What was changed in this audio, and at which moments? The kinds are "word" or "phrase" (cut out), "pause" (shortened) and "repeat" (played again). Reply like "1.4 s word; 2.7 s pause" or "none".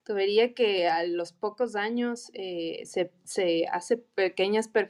none